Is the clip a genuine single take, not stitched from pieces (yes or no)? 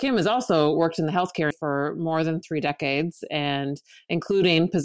no